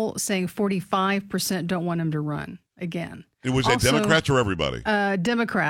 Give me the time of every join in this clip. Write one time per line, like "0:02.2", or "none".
0:02.7